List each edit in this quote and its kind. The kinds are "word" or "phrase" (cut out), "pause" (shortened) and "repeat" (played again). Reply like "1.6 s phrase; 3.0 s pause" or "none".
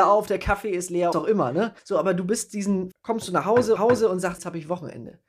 1.1 s phrase; 1.8 s pause; 2.9 s word; 3.8 s repeat; 4.4 s word